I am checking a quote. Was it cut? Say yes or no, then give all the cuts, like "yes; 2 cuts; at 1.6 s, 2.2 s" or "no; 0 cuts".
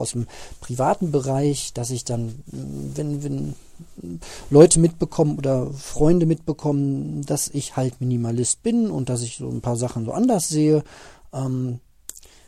no; 0 cuts